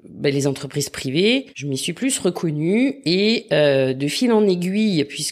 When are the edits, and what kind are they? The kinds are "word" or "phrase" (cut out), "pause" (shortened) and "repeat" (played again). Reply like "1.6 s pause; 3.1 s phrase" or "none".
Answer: 1.5 s pause